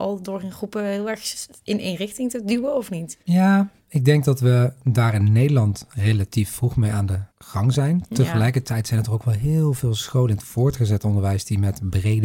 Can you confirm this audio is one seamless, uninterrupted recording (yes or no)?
no